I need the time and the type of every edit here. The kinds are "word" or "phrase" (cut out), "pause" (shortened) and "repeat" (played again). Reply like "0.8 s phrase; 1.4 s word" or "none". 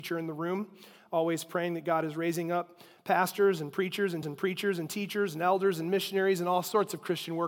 4.2 s repeat